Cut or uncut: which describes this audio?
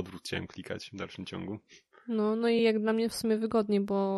uncut